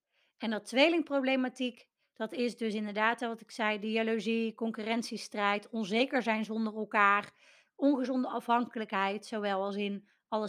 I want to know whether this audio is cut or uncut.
uncut